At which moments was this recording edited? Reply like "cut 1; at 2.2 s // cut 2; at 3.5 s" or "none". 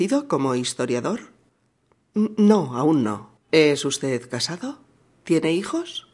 cut 1; at 3.4 s